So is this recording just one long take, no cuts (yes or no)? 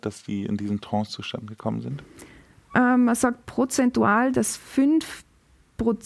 yes